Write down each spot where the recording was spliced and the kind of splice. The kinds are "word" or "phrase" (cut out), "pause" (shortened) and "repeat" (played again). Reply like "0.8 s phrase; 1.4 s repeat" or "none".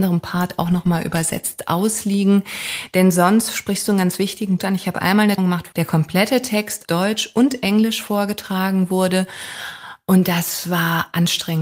4.6 s word; 5.4 s word; 5.7 s word; 6.8 s word